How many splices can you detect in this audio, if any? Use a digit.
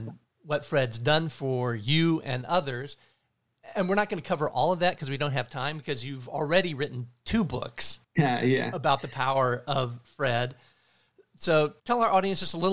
2